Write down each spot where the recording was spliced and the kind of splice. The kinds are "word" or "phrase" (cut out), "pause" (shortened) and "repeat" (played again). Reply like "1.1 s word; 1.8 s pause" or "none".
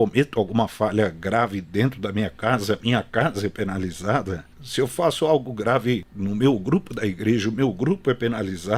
4.5 s pause